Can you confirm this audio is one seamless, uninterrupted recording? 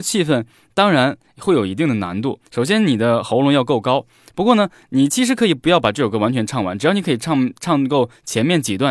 no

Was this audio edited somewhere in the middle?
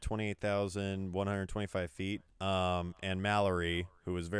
yes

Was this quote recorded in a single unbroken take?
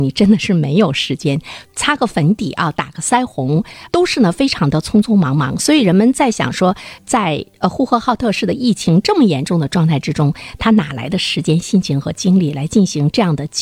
no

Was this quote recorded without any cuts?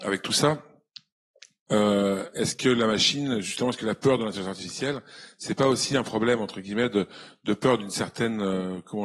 yes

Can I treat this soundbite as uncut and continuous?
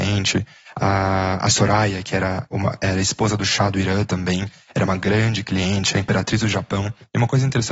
yes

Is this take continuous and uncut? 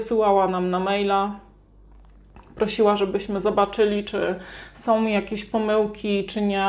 yes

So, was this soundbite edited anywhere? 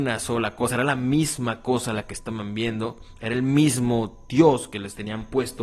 no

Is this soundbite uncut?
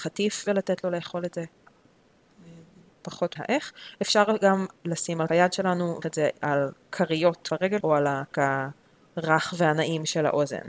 no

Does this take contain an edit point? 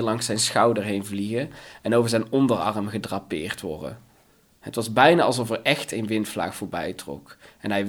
no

